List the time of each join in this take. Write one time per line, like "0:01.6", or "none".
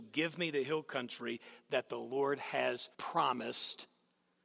0:02.9

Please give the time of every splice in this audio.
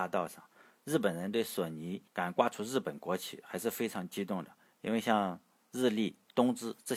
0:02.1

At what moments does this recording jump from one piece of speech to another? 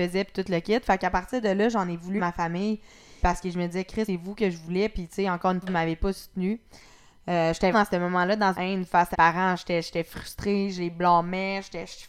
0:02.2
0:03.2
0:04.1
0:05.6
0:07.7
0:08.5
0:09.1

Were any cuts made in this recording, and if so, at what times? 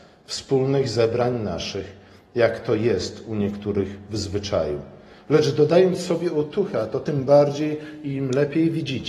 none

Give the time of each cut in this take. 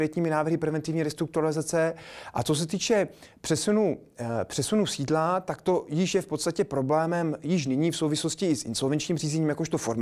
none

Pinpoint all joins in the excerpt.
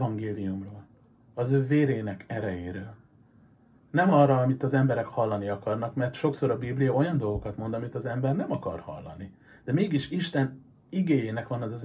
none

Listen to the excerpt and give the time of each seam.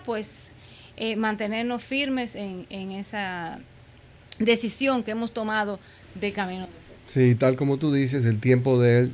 0:07.0

